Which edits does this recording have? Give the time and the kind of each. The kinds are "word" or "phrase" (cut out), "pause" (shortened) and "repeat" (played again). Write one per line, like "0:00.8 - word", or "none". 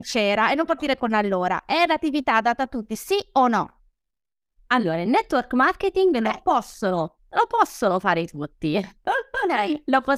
none